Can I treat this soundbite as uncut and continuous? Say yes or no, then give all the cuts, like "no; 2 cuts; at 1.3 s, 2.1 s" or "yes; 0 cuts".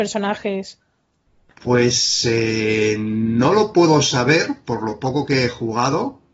yes; 0 cuts